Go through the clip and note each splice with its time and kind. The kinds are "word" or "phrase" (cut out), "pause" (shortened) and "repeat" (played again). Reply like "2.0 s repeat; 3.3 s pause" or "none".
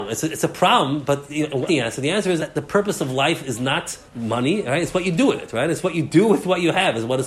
1.7 s word; 2.4 s word; 4.1 s pause